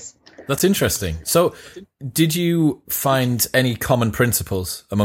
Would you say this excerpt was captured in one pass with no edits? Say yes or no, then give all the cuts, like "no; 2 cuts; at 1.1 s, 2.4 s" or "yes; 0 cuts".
yes; 0 cuts